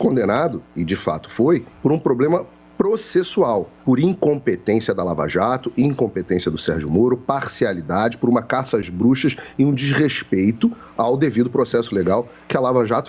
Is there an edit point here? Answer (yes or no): yes